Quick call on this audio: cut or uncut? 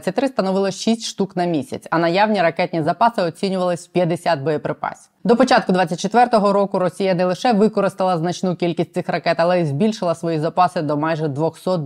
uncut